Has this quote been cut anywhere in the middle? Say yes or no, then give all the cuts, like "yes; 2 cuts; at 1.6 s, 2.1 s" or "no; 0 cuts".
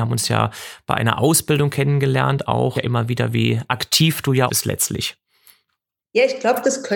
yes; 2 cuts; at 2.7 s, 4.5 s